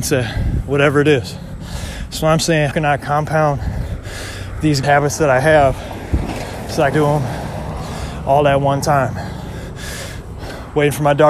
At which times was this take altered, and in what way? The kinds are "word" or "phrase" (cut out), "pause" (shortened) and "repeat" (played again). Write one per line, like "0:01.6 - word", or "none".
0:02.7 - word
0:04.8 - word
0:06.9 - word